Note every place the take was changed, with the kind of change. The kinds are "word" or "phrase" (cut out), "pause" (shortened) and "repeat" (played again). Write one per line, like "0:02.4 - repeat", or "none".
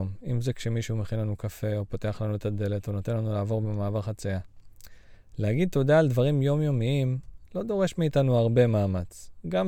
none

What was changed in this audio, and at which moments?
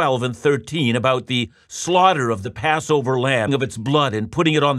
0:03.5 - phrase

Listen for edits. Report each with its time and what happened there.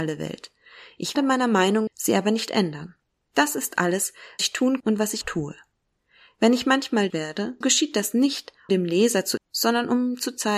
0:01.1 - word
0:01.9 - word
0:04.4 - word
0:04.8 - word
0:05.2 - word
0:07.1 - word
0:07.6 - word
0:08.7 - word
0:09.4 - word

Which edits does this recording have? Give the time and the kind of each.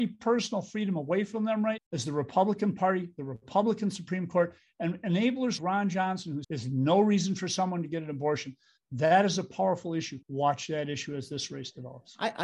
0:01.8 - word
0:05.6 - word
0:06.4 - phrase
0:10.2 - pause

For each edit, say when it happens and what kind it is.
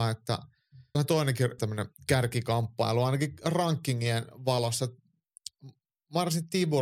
0:00.9 - word
0:01.6 - word

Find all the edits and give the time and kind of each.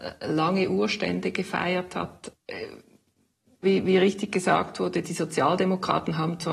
0:03.6 - phrase

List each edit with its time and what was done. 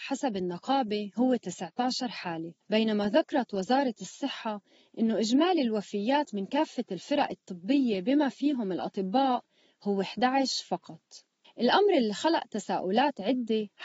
0:02.6 - pause

